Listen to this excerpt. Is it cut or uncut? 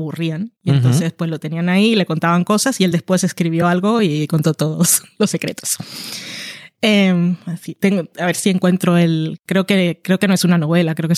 uncut